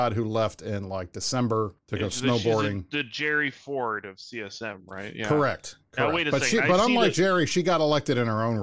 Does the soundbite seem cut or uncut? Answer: cut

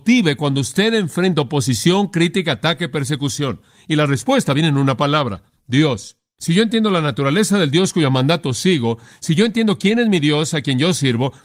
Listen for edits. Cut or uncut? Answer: uncut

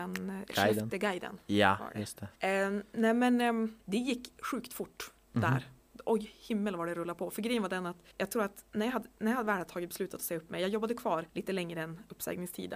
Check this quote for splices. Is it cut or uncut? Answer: cut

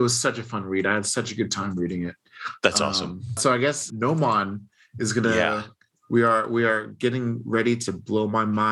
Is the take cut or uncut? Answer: uncut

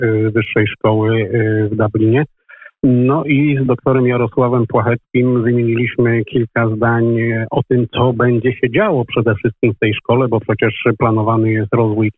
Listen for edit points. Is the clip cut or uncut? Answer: uncut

